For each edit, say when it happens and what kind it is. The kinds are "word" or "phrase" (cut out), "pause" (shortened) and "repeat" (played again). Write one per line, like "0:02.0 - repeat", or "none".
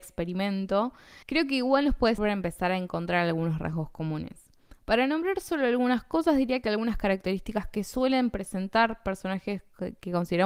0:01.2 - pause
0:02.2 - word

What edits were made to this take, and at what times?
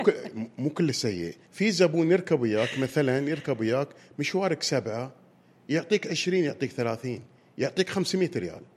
0:01.4 - pause

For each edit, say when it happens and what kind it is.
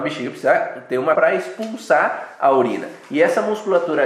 0:01.1 - word

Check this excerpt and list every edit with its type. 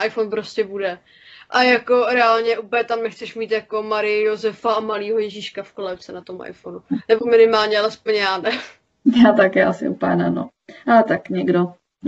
none

